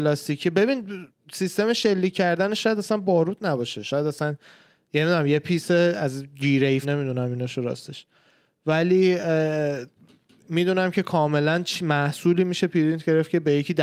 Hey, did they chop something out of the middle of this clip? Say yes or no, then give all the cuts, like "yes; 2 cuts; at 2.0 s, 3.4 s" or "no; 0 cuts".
yes; 1 cut; at 6.8 s